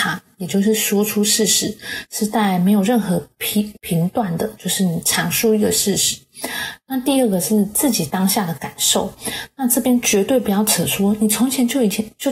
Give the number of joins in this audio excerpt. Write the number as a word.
one